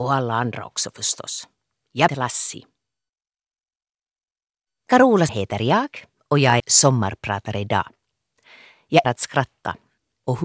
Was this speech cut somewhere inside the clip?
yes; 4 cuts; at 2.1 s, 5.3 s, 6.6 s, 9.0 s

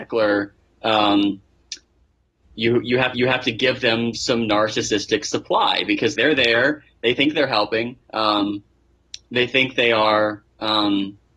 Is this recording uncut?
no; 3 cuts; at 3.1 s, 6.1 s, 8.0 s

